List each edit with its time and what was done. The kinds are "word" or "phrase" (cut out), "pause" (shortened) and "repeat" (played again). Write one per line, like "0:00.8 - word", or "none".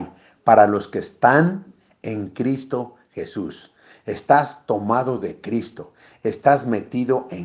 none